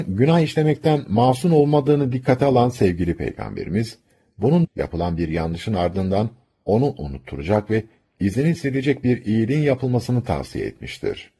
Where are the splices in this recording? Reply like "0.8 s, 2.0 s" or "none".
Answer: 4.6 s